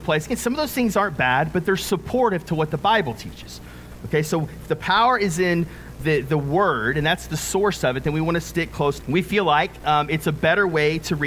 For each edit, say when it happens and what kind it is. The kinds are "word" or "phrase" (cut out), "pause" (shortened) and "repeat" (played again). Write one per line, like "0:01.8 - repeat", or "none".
0:09.0 - phrase

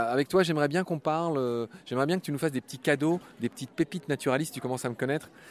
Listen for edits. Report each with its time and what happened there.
none

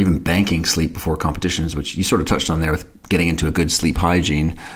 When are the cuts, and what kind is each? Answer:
none

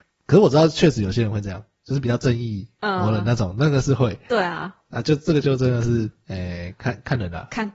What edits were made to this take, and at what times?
none

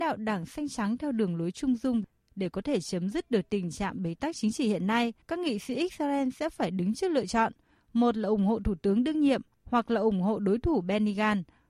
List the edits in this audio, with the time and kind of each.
0:05.2 - pause

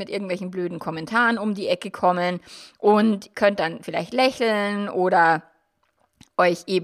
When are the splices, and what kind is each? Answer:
0:03.3 - word

